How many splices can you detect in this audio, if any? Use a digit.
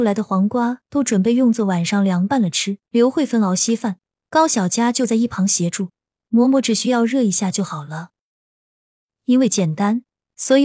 1